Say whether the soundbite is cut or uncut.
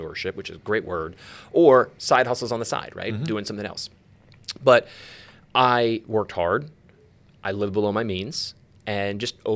uncut